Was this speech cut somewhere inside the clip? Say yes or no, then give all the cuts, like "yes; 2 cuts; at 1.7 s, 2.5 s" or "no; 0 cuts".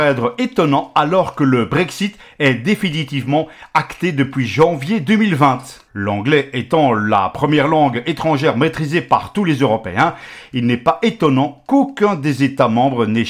no; 0 cuts